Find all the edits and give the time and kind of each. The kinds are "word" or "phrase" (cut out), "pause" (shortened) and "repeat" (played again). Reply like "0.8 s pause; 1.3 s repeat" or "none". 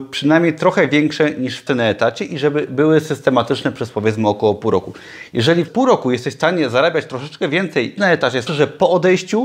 1.7 s word; 5.7 s word; 8.0 s word; 8.5 s phrase